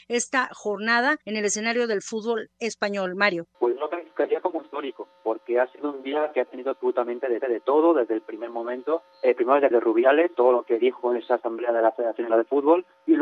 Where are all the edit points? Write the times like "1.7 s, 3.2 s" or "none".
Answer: 1.2 s, 3.5 s, 7.4 s, 9.1 s, 9.7 s, 10.3 s, 12.3 s